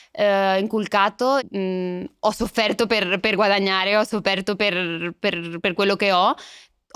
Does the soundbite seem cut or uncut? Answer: cut